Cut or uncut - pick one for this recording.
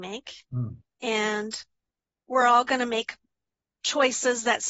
uncut